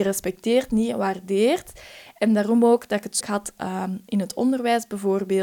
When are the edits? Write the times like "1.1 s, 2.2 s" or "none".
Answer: 3.2 s